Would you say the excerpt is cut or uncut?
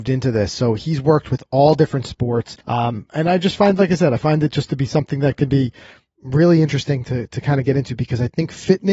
cut